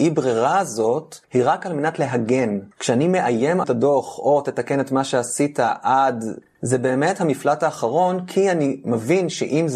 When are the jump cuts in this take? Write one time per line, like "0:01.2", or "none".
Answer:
0:01.2
0:02.7
0:03.6